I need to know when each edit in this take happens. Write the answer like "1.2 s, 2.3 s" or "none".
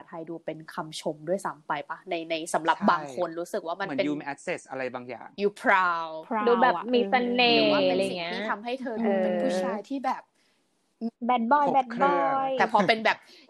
11.2 s